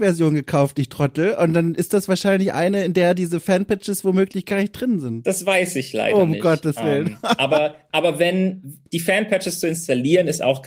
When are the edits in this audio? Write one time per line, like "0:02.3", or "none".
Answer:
0:08.9